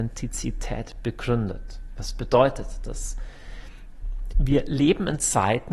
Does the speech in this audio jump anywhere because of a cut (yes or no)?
no